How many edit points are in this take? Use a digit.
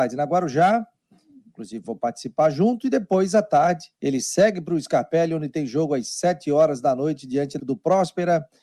2